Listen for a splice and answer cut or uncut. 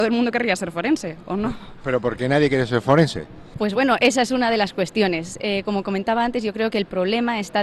uncut